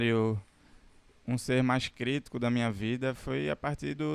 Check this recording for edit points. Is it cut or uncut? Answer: uncut